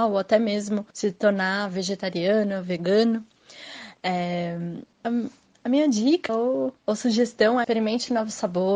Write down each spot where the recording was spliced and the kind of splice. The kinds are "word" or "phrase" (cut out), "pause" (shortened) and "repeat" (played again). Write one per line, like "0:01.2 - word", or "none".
0:00.9 - pause
0:04.9 - pause
0:06.3 - word
0:06.8 - pause
0:07.6 - word